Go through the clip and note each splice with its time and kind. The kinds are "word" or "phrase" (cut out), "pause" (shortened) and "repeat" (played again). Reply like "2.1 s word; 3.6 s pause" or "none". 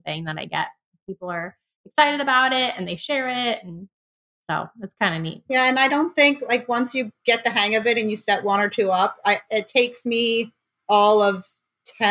none